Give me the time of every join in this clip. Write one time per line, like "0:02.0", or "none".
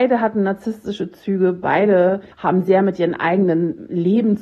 0:02.3